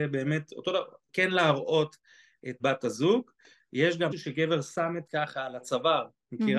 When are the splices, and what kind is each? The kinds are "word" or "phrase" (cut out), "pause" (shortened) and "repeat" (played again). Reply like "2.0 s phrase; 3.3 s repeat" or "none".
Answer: 1.1 s word; 2.6 s word; 4.1 s word; 5.1 s word